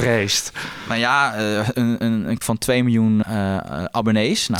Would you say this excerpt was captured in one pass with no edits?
no; 3 cuts; at 1.7 s, 2.4 s, 3.2 s

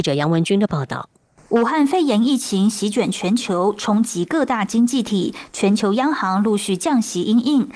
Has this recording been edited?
no; 0 cuts

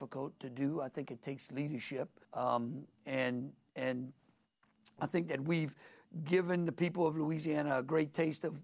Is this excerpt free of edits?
no; 1 cut; at 2.2 s

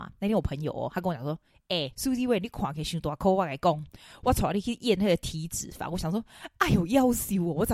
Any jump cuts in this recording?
yes; 1 cut; at 1.9 s

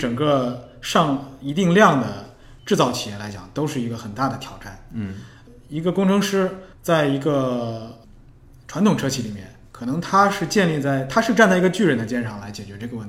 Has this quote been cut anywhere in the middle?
yes; 2 cuts; at 2.6 s, 6.7 s

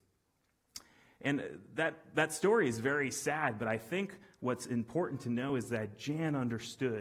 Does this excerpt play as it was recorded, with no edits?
yes; 0 cuts

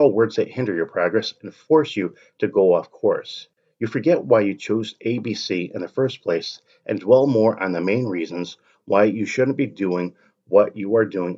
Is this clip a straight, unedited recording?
yes; 0 cuts

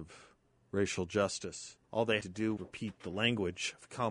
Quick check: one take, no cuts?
no; 3 cuts; at 1.8 s, 2.2 s, 2.6 s

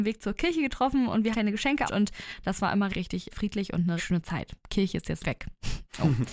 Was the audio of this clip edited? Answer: yes; 6 cuts; at 1.3 s, 1.9 s, 2.9 s, 3.3 s, 4.0 s, 5.2 s

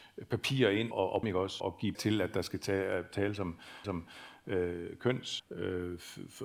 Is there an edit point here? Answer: yes; 6 cuts; at 0.9 s, 1.2 s, 1.6 s, 1.9 s, 3.8 s, 5.4 s

